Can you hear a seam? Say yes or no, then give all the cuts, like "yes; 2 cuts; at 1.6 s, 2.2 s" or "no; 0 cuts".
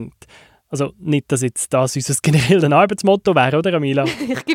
no; 0 cuts